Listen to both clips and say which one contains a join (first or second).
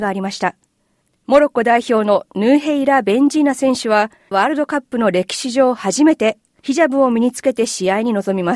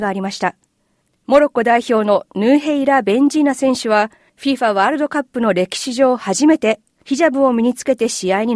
first